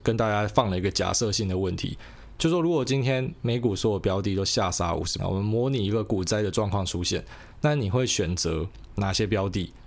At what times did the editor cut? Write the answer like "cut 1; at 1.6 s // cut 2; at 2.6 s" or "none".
cut 1; at 5.2 s